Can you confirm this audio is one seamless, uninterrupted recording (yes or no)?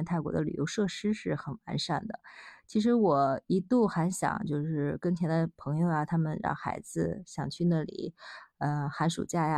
yes